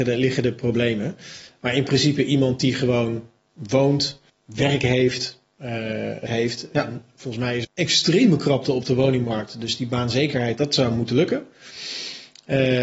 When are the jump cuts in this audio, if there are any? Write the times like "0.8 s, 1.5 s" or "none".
4.3 s, 6.3 s, 7.6 s